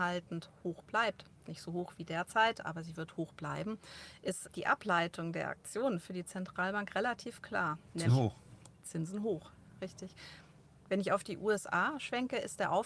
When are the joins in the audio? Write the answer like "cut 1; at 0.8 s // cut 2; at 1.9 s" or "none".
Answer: cut 1; at 1.4 s // cut 2; at 4.4 s // cut 3; at 8.1 s // cut 4; at 9.6 s